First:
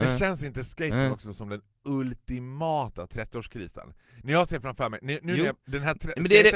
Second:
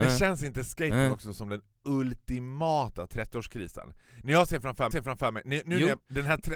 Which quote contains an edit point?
second; 1 cut; at 4.9 s

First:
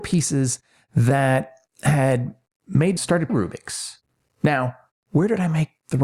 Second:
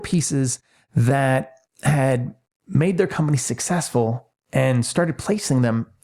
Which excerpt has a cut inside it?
first; 2 cuts; at 3.0 s, 3.3 s

